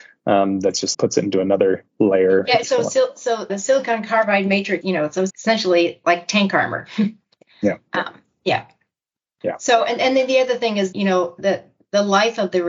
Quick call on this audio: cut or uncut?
cut